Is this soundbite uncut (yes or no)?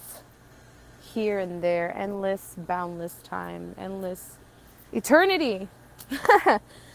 no